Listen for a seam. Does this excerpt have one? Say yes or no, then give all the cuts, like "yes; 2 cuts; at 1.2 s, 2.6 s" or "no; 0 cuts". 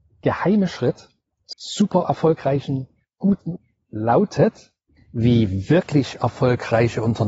yes; 3 cuts; at 1.5 s, 3.6 s, 5.0 s